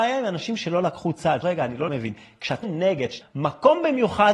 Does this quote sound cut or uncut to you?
cut